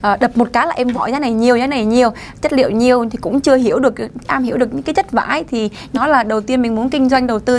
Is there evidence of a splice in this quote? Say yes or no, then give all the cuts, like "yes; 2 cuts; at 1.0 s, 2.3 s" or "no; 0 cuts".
yes; 3 cuts; at 0.9 s, 4.2 s, 5.9 s